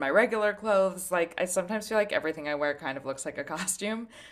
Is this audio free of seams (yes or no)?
yes